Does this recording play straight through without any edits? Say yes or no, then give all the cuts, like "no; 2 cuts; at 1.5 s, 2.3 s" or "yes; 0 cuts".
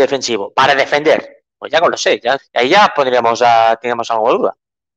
no; 2 cuts; at 1.5 s, 2.4 s